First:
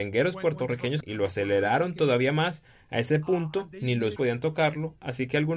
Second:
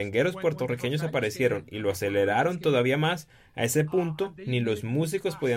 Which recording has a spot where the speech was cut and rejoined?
first; 2 cuts; at 1.0 s, 4.2 s

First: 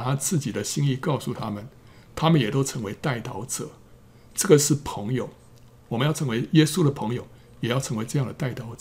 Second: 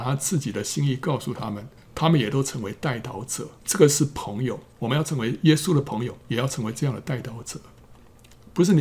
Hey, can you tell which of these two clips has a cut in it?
second; 4 cuts; at 1.8 s, 3.6 s, 4.7 s, 6.2 s

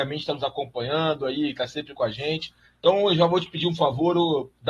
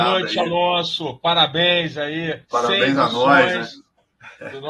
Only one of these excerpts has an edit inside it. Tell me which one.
second; 1 cut; at 2.4 s

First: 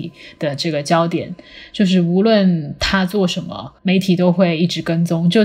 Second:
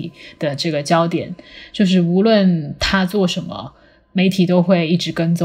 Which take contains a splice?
first; 1 cut; at 3.8 s

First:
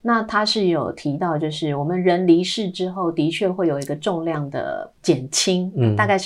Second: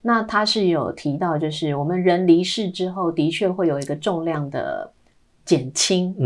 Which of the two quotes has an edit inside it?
first; 1 cut; at 5.0 s

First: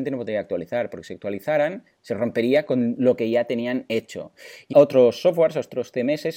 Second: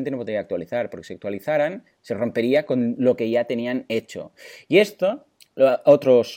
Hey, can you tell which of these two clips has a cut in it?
first; 1 cut; at 4.7 s

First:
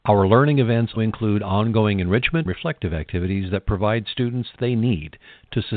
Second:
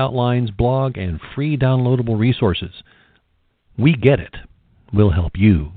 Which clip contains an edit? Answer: first; 3 cuts; at 1.0 s, 2.5 s, 4.6 s

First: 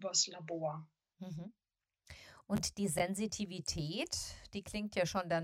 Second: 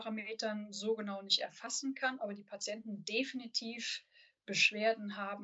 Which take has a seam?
first; 1 cut; at 1.0 s

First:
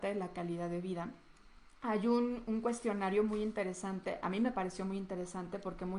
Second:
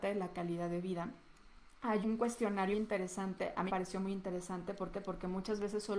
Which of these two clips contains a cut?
second; 4 cuts; at 2.0 s, 2.7 s, 3.7 s, 4.9 s

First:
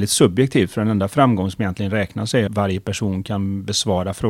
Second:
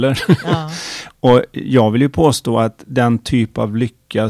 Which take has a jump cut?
first; 1 cut; at 2.5 s

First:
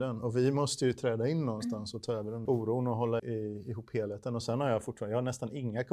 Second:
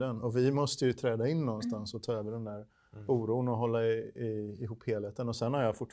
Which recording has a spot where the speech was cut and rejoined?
first; 2 cuts; at 2.5 s, 3.2 s

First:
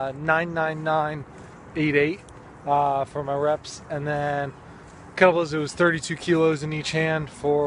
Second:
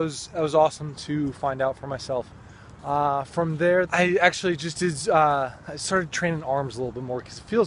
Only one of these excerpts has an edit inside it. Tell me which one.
second; 1 cut; at 3.9 s

